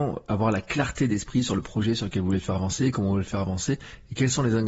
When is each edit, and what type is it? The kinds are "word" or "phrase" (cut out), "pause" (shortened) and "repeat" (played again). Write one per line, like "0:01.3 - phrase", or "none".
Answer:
none

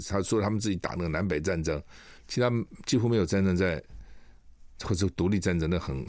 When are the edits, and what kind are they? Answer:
0:02.2 - pause

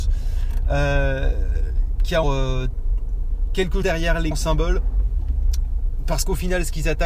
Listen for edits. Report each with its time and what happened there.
0:02.2 - word
0:03.8 - word
0:04.3 - word

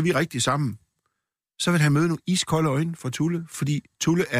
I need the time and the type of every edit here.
none

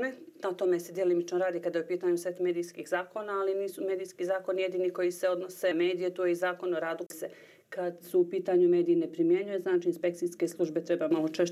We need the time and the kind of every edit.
0:05.7 - word
0:07.1 - word

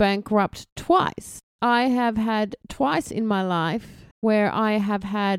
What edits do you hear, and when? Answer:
0:01.5 - pause
0:04.1 - pause

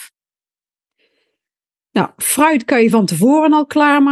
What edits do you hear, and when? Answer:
none

